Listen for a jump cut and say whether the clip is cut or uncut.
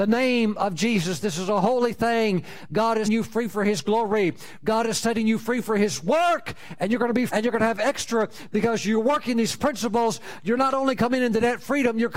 cut